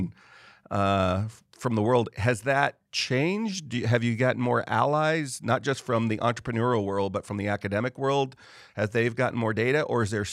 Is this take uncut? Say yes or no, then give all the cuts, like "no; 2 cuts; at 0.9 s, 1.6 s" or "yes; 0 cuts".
yes; 0 cuts